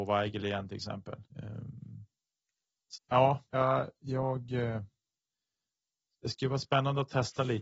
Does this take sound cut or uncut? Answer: cut